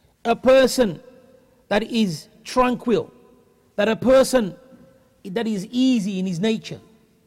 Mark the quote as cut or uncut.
uncut